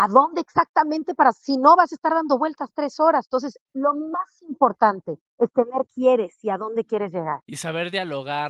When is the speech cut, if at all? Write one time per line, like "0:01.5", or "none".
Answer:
0:03.6
0:05.3
0:05.9

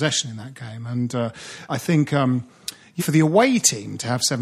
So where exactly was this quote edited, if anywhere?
0:01.7
0:03.0

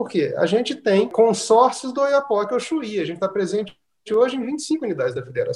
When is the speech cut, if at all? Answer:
none

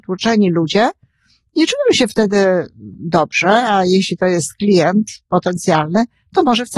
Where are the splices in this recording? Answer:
none

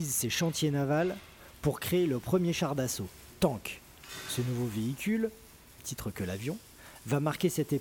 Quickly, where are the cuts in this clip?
0:03.3
0:05.8

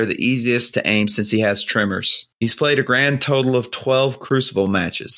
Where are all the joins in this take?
0:02.3

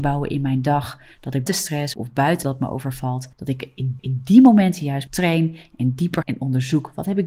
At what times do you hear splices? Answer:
0:01.5
0:01.9
0:02.4
0:03.3
0:04.0
0:05.1
0:06.2

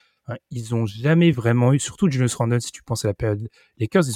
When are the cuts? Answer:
none

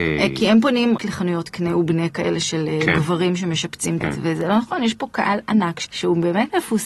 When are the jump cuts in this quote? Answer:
0:01.0
0:04.0
0:05.8

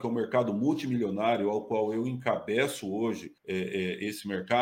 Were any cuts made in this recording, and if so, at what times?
0:03.4

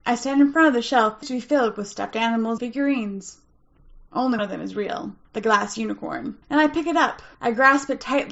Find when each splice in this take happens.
0:01.2
0:02.6
0:04.4
0:05.2
0:06.4
0:07.3

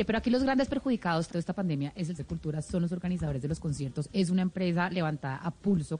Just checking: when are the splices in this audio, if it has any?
0:01.3
0:02.2

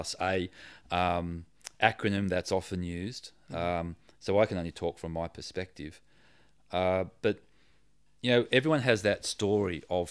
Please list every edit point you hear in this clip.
none

